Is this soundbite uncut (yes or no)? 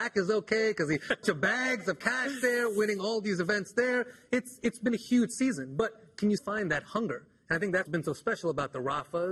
no